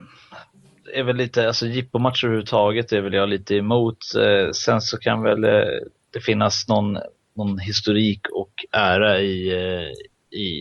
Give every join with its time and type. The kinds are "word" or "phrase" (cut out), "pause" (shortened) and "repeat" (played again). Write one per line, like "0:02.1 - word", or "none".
none